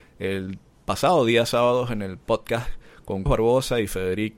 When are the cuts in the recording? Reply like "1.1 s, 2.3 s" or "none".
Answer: 3.3 s

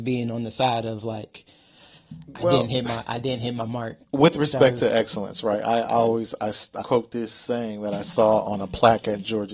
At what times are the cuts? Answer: 6.8 s

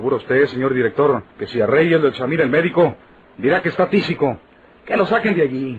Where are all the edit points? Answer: 1.3 s

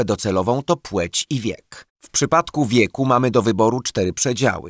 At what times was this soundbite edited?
1.9 s

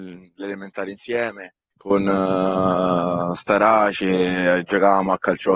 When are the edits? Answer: 1.6 s

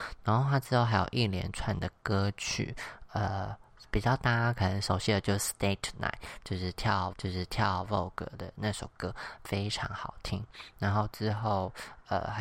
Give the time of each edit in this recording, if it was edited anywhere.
7.1 s

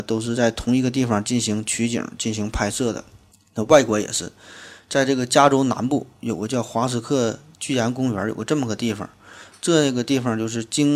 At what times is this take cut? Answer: 3.3 s

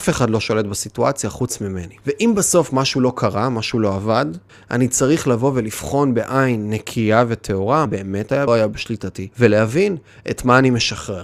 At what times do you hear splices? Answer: 2.0 s, 4.5 s, 7.9 s, 8.5 s, 9.3 s

